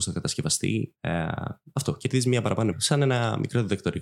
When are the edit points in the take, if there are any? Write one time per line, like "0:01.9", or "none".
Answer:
0:00.9
0:02.7